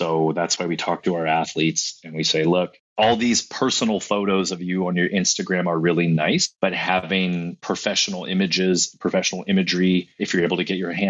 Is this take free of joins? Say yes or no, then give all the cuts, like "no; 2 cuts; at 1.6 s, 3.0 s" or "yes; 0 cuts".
no; 2 cuts; at 2.9 s, 6.6 s